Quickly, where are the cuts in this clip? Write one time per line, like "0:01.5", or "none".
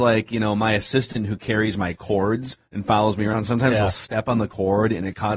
0:02.6